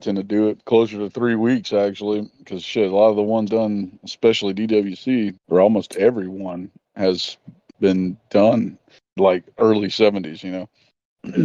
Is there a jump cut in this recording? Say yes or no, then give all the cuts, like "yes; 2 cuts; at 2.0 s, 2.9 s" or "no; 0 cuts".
yes; 3 cuts; at 3.5 s, 5.4 s, 9.2 s